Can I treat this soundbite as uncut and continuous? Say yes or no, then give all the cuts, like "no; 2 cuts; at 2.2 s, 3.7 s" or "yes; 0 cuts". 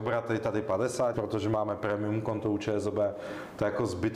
no; 1 cut; at 1.1 s